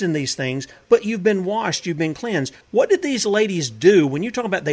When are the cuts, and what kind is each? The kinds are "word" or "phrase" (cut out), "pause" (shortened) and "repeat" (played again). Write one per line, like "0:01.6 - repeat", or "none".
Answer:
0:02.6 - pause